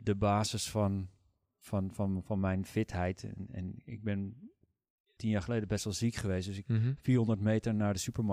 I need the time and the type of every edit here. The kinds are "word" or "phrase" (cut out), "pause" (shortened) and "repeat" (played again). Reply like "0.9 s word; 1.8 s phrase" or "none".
none